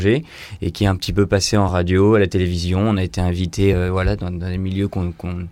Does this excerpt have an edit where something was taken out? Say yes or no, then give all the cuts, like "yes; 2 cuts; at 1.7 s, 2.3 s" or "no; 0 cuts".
no; 0 cuts